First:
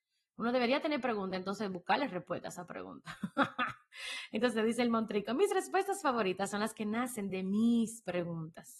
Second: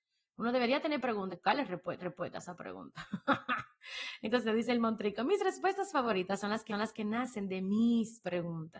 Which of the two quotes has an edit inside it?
second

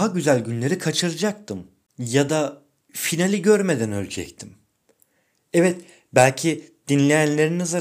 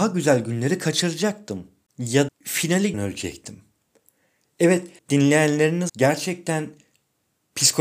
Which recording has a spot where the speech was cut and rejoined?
second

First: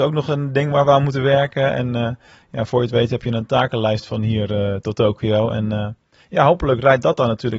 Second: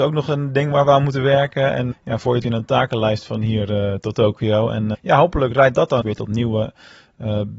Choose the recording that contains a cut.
second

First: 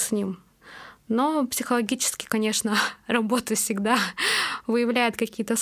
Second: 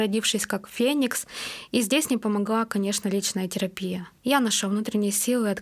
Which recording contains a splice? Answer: second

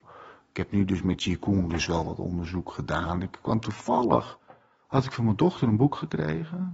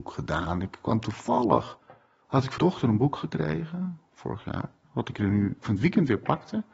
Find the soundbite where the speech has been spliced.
second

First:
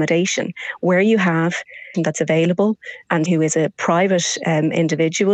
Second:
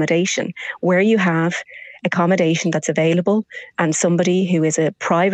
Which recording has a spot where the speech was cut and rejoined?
first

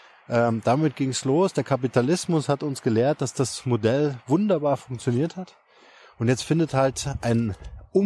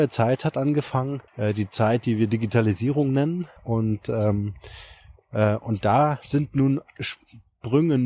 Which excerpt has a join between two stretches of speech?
second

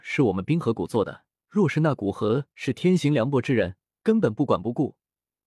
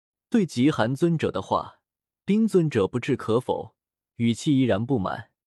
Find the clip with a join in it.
first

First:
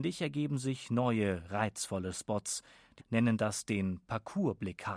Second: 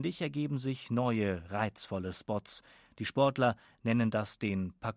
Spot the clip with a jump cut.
first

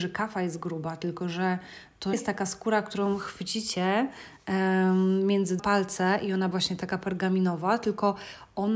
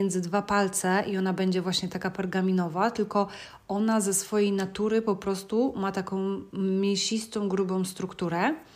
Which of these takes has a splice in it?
first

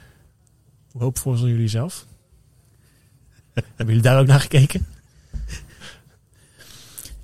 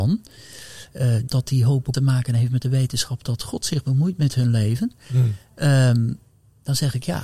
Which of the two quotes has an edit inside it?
second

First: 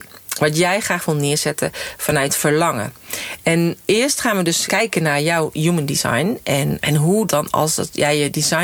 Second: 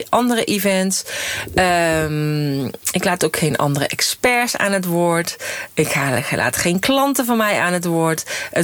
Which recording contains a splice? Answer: first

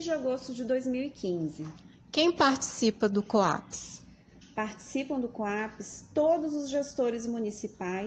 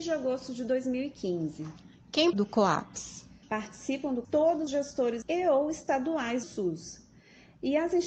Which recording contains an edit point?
second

